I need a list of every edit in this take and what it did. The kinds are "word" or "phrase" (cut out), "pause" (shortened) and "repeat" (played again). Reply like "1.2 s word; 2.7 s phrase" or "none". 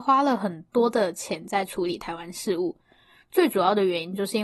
none